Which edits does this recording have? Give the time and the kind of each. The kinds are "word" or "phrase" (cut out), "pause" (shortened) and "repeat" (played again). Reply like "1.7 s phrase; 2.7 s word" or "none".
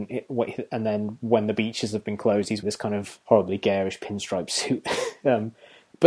2.6 s word; 3.2 s pause